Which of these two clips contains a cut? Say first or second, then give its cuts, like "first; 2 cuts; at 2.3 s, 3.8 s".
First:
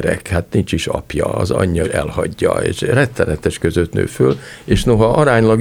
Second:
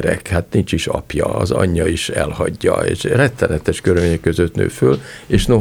first; 2 cuts; at 1.8 s, 3.6 s